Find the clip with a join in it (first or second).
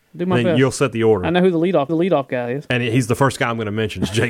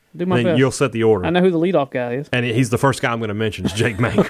first